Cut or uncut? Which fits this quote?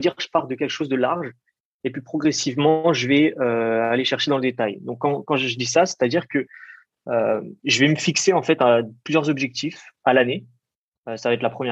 uncut